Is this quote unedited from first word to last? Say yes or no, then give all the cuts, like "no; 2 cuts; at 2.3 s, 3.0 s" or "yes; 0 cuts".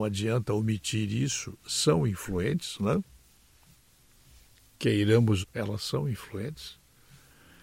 no; 2 cuts; at 1.6 s, 5.4 s